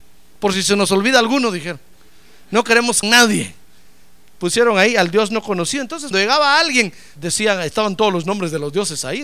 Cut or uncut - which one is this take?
cut